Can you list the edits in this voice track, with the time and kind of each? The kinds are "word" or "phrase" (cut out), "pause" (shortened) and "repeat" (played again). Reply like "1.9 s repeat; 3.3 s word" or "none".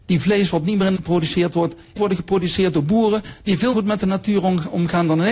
1.0 s word; 2.0 s phrase; 3.7 s word